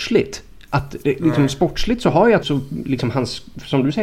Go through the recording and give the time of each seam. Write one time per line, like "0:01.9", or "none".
0:02.4

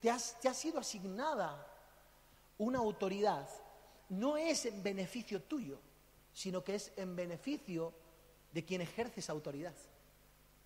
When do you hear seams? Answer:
none

